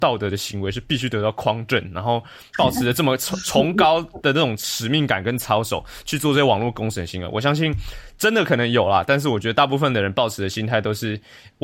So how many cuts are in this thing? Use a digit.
0